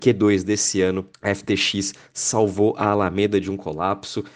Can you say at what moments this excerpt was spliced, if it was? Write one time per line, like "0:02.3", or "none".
0:01.1